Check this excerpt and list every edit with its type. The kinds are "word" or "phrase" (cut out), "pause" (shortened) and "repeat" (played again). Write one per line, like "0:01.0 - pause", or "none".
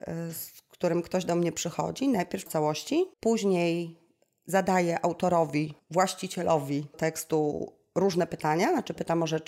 0:02.5 - word
0:03.1 - pause
0:05.8 - word
0:06.9 - word